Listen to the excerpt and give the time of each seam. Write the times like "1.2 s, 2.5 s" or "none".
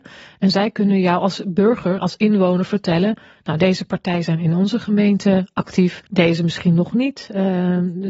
6.1 s